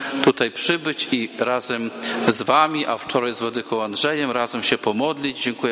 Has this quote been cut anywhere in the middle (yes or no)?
no